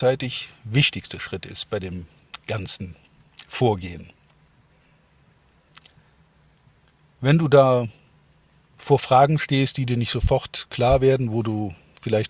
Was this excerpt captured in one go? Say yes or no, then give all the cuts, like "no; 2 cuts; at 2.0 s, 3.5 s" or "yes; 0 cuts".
yes; 0 cuts